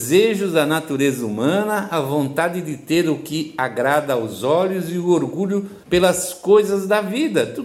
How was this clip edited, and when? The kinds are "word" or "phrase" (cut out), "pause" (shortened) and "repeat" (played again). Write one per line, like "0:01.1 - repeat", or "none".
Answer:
0:05.8 - pause